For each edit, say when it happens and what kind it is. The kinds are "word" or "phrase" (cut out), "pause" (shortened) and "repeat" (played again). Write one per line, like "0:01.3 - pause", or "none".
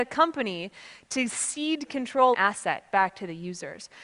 0:02.3 - phrase